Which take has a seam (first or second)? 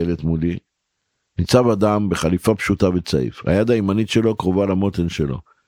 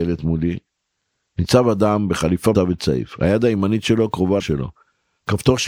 second